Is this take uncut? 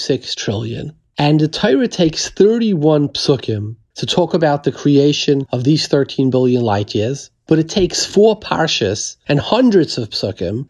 yes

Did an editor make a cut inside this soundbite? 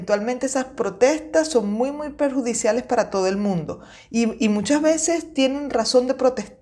no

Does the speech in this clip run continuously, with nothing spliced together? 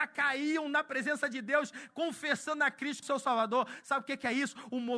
no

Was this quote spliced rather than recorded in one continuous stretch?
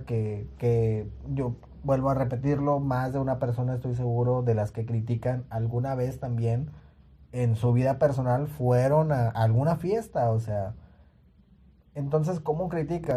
no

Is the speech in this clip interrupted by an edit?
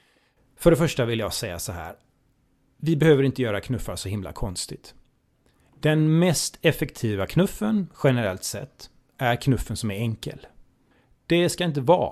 no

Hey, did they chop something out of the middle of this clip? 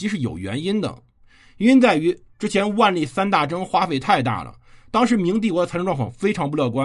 no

